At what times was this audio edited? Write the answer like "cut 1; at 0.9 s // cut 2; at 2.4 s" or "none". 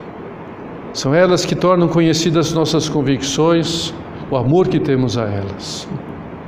cut 1; at 4.3 s